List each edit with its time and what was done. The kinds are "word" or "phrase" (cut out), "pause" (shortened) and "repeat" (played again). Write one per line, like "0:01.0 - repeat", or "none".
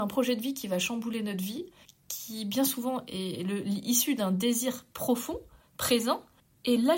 none